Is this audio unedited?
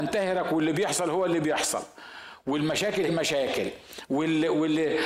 no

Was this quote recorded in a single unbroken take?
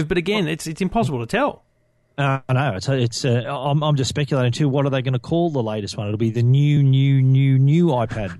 yes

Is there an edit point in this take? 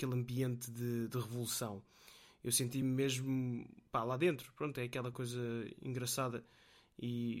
no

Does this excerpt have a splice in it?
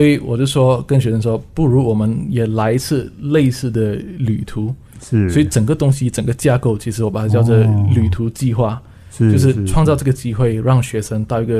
no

